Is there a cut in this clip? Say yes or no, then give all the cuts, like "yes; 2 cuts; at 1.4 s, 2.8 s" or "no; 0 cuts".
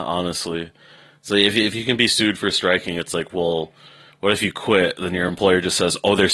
no; 0 cuts